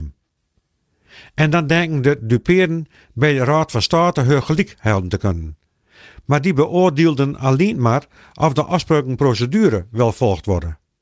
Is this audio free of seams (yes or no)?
yes